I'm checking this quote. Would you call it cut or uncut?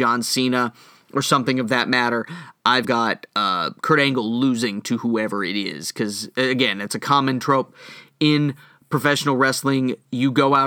cut